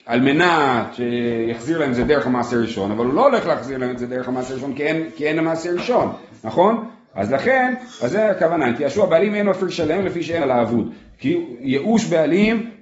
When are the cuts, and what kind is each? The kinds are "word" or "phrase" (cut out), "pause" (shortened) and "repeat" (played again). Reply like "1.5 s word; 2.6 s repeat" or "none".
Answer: 10.4 s word